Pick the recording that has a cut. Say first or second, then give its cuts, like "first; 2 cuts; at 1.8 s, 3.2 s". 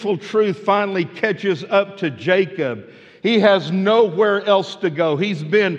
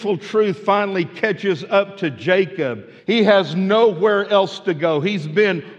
second; 1 cut; at 3.0 s